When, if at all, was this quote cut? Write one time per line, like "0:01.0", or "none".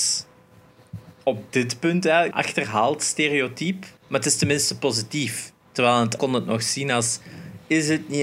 0:02.3
0:04.0
0:06.2